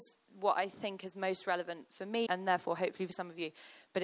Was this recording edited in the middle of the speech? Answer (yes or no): yes